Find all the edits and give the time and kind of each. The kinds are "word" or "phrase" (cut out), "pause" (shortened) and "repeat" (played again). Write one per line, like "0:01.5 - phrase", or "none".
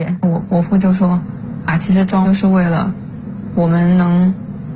0:02.2 - word